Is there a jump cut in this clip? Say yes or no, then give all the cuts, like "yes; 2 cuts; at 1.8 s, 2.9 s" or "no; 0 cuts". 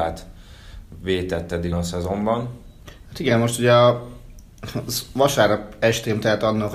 yes; 1 cut; at 1.7 s